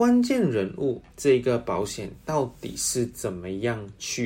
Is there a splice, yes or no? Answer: yes